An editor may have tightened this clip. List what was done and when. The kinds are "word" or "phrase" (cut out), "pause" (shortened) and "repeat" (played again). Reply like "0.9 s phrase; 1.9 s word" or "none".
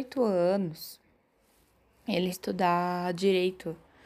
2.3 s word